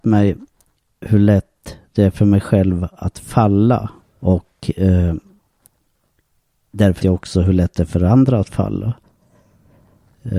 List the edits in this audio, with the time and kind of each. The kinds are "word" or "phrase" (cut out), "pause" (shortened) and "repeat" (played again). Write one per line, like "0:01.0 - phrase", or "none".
0:04.0 - pause
0:07.0 - word